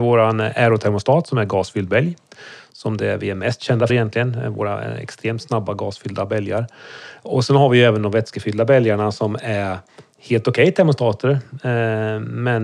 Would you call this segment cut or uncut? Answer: cut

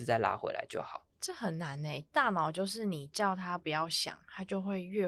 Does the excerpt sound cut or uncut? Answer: cut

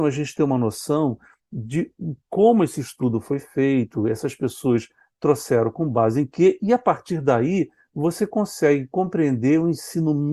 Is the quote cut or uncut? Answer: uncut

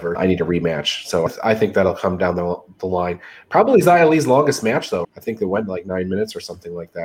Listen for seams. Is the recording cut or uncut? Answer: uncut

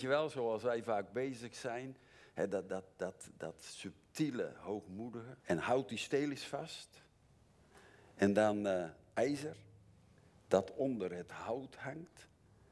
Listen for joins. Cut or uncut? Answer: cut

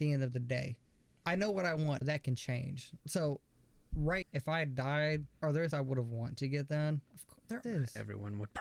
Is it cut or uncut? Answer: cut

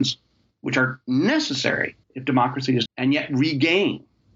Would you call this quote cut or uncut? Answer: cut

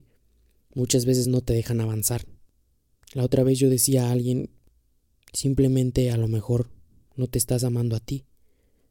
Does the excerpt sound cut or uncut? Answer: uncut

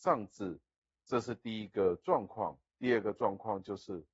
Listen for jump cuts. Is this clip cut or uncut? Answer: cut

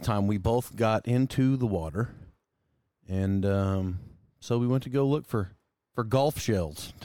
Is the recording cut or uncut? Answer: uncut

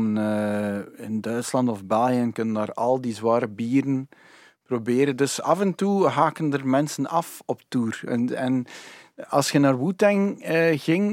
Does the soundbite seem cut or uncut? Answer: uncut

